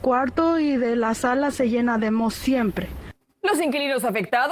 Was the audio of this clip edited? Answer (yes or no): no